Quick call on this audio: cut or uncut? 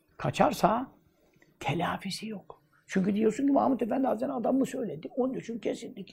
uncut